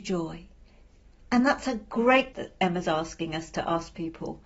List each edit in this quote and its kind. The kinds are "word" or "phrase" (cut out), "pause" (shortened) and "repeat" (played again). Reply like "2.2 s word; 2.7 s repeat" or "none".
2.3 s word